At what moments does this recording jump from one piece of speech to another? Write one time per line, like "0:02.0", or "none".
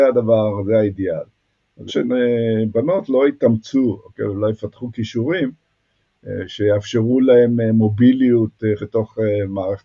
0:01.9
0:08.8